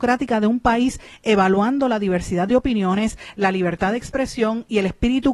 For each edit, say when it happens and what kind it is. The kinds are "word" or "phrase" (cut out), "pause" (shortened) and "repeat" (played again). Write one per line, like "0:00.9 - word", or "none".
none